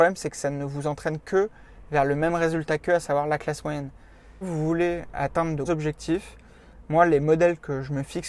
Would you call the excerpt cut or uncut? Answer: cut